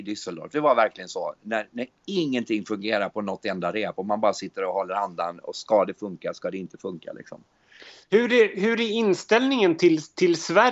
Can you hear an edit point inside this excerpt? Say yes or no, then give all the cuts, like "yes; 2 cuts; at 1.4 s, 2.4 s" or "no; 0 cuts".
no; 0 cuts